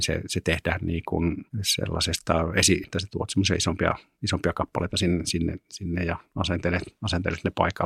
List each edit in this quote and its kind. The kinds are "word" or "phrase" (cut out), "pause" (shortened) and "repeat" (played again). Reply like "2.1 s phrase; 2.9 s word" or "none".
1.5 s pause; 2.8 s word